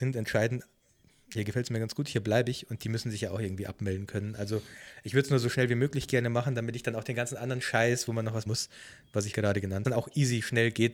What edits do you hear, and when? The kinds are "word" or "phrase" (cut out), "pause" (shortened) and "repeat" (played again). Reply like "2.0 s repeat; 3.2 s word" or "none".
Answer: 1.3 s word; 8.5 s word; 9.3 s word; 9.8 s phrase